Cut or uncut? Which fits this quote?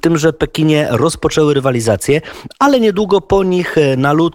uncut